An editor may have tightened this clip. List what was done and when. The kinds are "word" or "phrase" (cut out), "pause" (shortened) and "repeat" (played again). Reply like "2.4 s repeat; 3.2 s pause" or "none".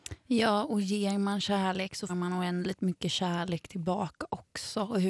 2.1 s word